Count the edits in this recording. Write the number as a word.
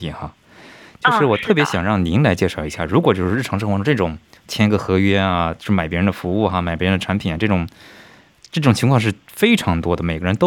one